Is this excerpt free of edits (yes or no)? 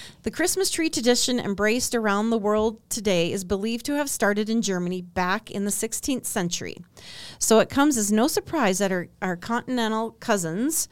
yes